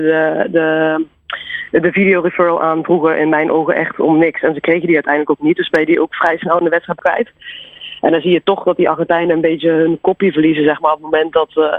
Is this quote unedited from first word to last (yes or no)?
no